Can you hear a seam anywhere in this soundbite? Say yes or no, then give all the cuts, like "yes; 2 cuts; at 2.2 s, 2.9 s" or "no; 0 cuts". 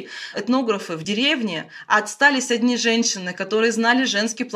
no; 0 cuts